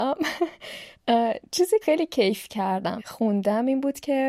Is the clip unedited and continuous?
no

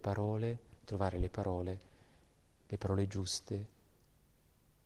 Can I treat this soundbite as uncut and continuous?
yes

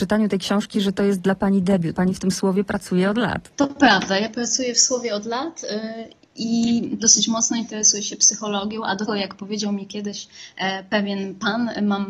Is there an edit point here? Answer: yes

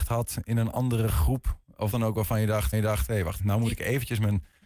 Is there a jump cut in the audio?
yes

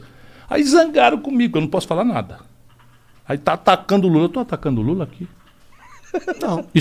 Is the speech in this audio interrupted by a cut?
no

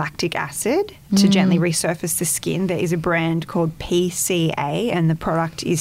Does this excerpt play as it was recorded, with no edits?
yes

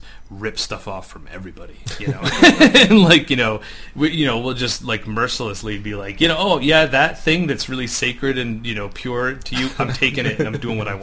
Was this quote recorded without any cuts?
yes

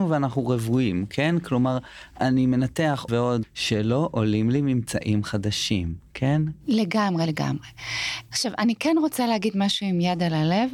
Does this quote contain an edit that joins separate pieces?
yes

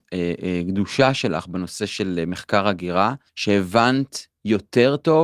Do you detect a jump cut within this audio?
yes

